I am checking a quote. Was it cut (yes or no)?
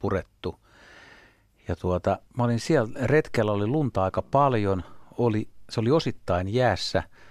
yes